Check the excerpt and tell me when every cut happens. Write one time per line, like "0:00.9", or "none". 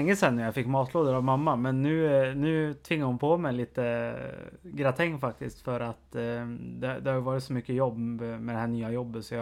none